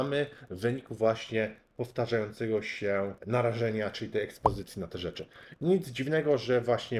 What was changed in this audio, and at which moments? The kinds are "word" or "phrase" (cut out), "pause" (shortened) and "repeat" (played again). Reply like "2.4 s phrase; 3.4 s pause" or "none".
3.2 s pause